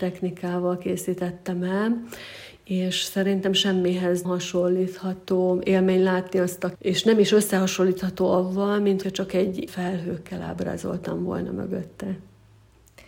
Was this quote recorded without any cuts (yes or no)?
no